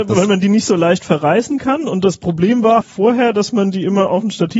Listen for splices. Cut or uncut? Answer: cut